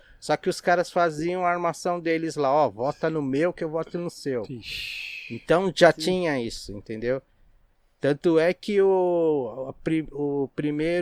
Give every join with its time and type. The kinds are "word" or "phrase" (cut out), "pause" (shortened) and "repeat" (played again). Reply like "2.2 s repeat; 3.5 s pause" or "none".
none